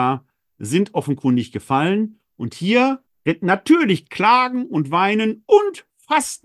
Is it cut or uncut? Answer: cut